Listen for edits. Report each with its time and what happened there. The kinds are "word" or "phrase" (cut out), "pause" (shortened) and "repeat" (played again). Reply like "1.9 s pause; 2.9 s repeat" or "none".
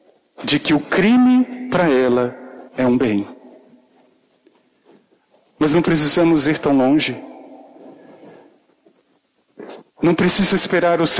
2.7 s pause